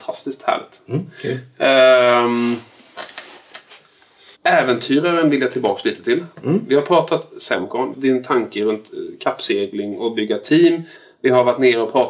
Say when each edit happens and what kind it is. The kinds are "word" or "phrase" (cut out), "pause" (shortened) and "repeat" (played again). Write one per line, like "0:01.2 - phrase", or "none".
0:04.3 - pause
0:07.9 - phrase